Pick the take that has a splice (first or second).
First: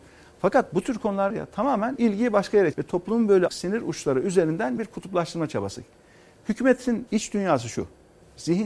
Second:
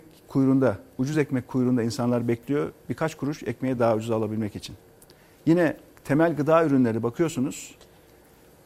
first